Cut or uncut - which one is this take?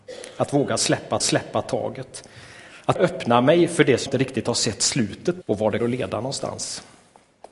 cut